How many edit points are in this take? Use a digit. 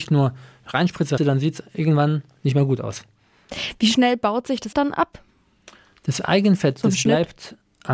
2